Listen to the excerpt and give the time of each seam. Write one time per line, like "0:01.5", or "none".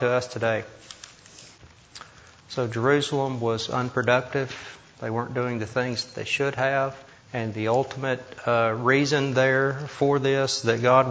0:07.1